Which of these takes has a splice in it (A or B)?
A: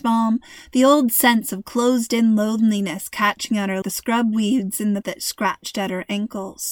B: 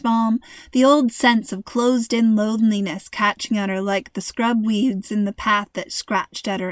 A